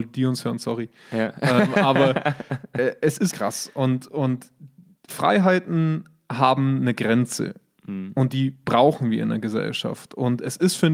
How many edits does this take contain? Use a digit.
1